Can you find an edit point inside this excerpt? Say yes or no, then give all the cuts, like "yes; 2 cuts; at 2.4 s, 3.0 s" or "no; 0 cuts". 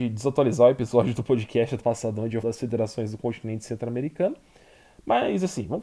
yes; 2 cuts; at 1.8 s, 2.4 s